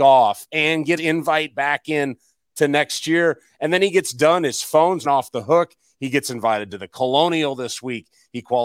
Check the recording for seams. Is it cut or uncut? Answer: cut